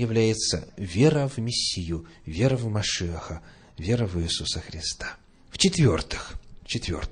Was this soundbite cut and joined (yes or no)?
no